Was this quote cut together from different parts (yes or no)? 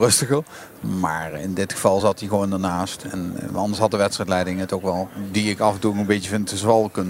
no